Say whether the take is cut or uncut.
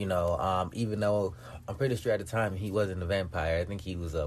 uncut